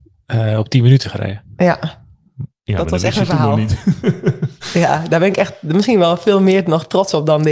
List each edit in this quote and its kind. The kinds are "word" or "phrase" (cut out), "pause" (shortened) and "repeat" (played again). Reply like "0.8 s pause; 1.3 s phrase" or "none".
none